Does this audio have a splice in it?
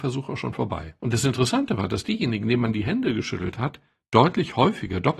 no; 0 cuts

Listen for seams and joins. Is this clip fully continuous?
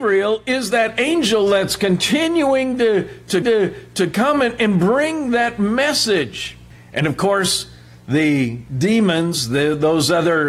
no; 1 cut; at 3.4 s

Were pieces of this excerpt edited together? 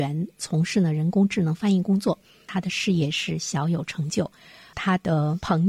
no; 0 cuts

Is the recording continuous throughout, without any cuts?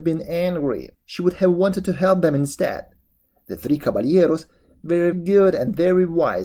no; 2 cuts; at 0.9 s, 5.1 s

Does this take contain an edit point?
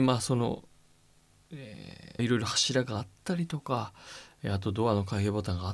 yes; 1 cut; at 2.2 s

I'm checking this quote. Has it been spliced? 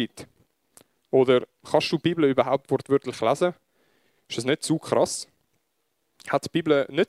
no; 0 cuts

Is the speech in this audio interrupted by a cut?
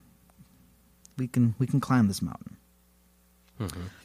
no; 0 cuts

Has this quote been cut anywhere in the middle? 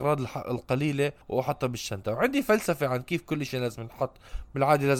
yes; 1 cut; at 1.2 s

